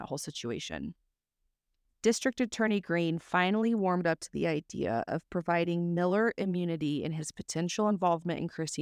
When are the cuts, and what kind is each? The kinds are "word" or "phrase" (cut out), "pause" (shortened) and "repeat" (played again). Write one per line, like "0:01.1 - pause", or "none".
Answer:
none